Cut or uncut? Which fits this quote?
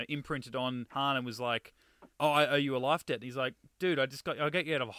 cut